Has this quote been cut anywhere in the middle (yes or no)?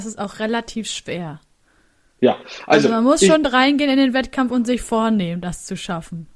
no